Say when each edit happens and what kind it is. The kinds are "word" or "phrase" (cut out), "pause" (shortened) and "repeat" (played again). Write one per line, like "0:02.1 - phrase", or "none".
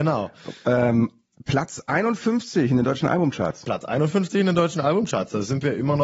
none